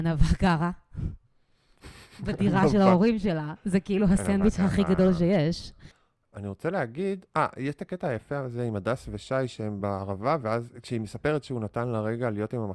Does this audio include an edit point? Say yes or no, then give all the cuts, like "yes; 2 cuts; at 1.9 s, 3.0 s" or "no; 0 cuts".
no; 0 cuts